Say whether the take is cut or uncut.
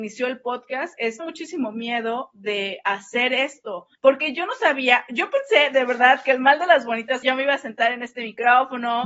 cut